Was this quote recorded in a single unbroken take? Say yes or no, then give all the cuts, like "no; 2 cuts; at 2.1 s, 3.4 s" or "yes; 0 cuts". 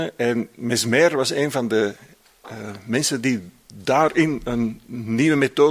yes; 0 cuts